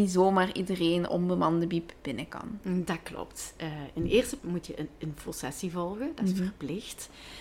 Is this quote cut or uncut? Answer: cut